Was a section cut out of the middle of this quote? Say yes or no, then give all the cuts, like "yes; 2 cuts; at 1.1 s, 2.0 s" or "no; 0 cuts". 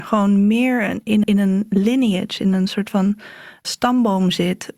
yes; 2 cuts; at 1.2 s, 3.6 s